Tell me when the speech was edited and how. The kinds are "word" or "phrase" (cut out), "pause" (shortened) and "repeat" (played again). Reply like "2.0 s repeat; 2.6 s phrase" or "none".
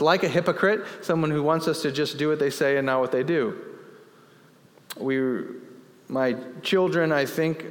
none

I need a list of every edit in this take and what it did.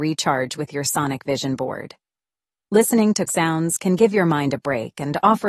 3.3 s word

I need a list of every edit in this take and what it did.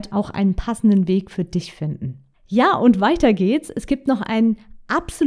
2.3 s pause

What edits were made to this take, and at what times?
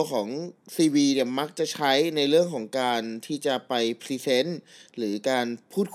none

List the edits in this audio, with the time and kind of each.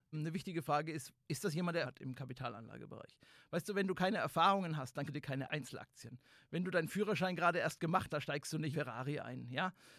1.8 s word; 5.1 s word; 8.1 s word; 8.7 s word

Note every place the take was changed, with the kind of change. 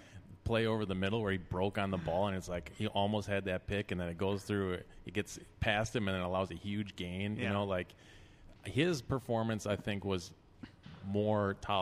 8.6 s pause

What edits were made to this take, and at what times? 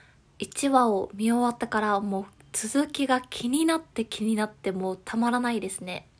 none

